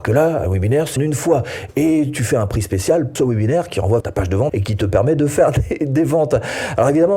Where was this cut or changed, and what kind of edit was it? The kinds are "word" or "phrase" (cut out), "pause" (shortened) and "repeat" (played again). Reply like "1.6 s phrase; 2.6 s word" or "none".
1.0 s word; 3.2 s word; 4.0 s word; 4.5 s word